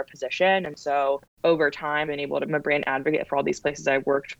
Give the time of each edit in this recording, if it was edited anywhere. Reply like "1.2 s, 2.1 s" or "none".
1.2 s, 2.0 s, 2.5 s